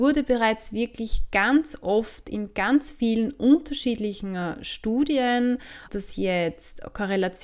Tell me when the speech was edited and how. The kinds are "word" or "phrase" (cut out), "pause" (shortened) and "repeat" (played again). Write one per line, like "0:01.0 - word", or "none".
0:05.9 - word